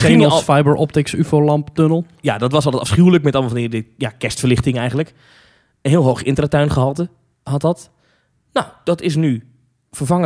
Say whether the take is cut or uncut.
uncut